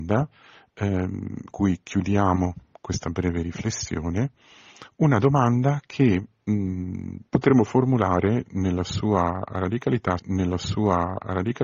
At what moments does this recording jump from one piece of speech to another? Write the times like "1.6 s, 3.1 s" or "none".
1.5 s, 7.3 s, 10.2 s